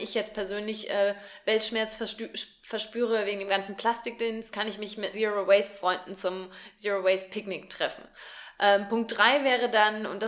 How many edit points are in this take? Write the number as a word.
two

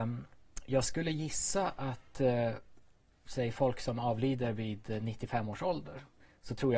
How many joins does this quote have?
zero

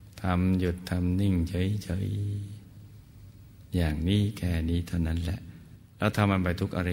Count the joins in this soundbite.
one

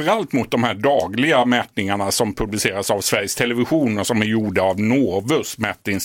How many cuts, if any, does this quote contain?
zero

